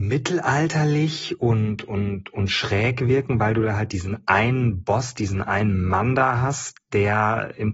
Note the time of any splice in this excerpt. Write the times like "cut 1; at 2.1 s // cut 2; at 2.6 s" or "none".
none